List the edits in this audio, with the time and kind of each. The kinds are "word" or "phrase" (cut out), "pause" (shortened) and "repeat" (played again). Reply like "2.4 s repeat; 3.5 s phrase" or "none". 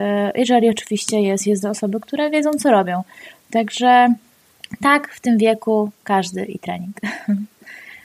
1.6 s phrase